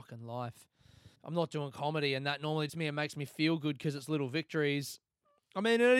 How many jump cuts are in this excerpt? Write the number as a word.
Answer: two